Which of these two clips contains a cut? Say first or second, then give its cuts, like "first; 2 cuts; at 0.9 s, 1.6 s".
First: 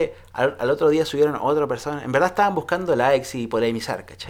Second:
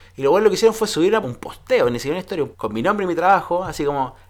second; 2 cuts; at 1.2 s, 2.5 s